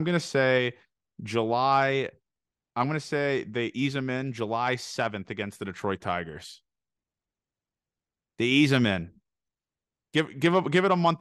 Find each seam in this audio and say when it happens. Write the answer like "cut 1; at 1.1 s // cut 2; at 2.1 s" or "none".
none